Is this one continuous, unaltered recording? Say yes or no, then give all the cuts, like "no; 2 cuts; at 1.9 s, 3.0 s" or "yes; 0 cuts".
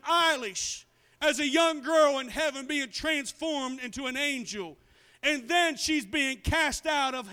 yes; 0 cuts